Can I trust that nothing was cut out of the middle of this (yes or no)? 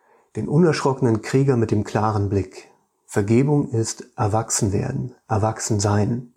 yes